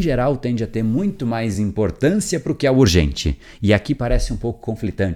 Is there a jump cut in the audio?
no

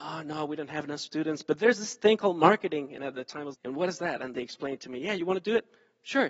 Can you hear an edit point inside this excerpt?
yes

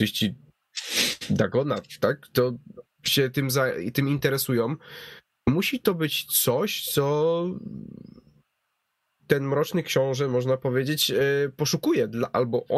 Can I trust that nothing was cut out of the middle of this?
yes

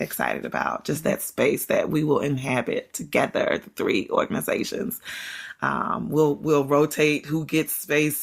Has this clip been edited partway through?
no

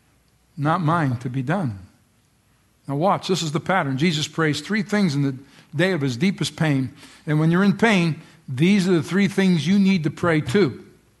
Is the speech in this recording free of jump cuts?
yes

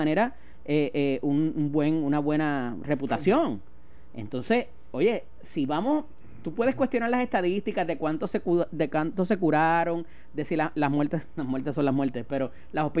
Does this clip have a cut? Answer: no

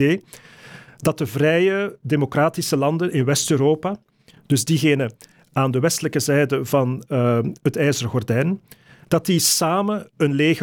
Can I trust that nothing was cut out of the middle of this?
yes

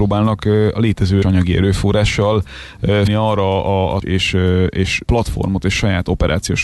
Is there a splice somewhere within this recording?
yes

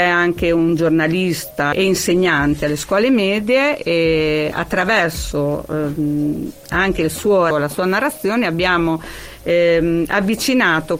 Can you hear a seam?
yes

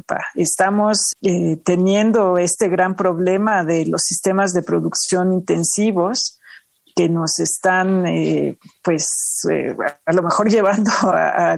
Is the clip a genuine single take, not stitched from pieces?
no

